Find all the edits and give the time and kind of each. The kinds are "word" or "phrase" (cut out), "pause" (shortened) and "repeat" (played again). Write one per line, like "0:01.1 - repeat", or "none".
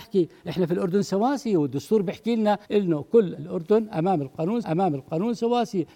0:02.6 - pause
0:03.4 - word
0:04.6 - repeat